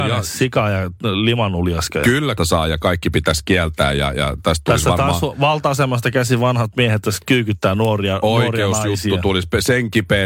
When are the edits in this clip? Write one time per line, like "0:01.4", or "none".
0:02.4